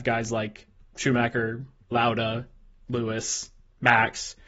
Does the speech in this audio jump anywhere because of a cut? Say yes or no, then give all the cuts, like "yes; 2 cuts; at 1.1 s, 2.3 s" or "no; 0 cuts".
no; 0 cuts